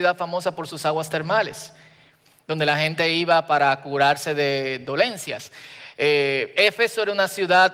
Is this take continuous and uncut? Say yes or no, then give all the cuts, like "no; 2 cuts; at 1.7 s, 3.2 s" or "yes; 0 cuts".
yes; 0 cuts